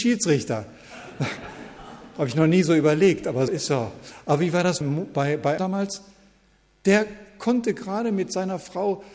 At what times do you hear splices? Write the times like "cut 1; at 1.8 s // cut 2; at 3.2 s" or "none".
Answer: cut 1; at 3.5 s // cut 2; at 4.8 s // cut 3; at 5.6 s

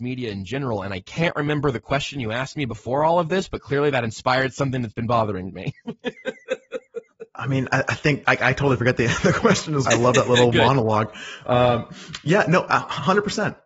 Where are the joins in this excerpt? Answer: cut 1; at 8.2 s // cut 2; at 9.9 s

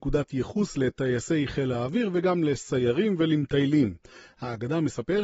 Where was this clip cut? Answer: none

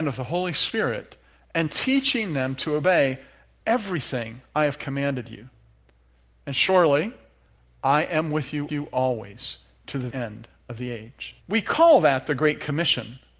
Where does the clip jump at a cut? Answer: cut 1; at 8.7 s // cut 2; at 10.1 s // cut 3; at 11.4 s

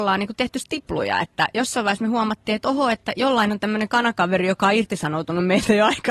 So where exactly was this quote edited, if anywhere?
none

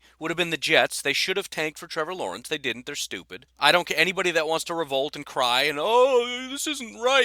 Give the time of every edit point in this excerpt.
cut 1; at 3.5 s

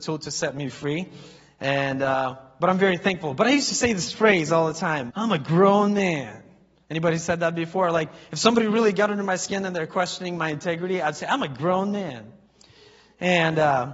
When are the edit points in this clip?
cut 1; at 5.1 s

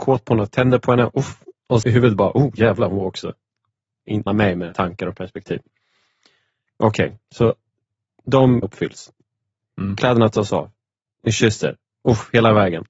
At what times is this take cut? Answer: cut 1; at 1.8 s // cut 2; at 4.3 s // cut 3; at 4.7 s // cut 4; at 8.6 s

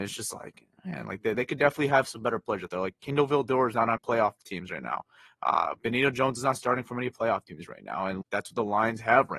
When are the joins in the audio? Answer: cut 1; at 1.3 s // cut 2; at 4.0 s // cut 3; at 8.2 s

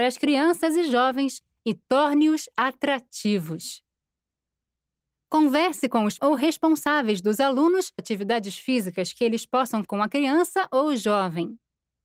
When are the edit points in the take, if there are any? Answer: cut 1; at 6.2 s // cut 2; at 8.0 s // cut 3; at 9.8 s

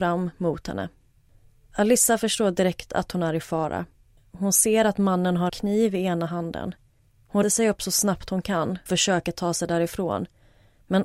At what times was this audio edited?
cut 1; at 5.5 s // cut 2; at 7.4 s // cut 3; at 8.9 s

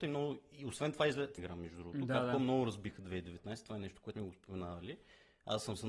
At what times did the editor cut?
cut 1; at 1.4 s // cut 2; at 4.1 s

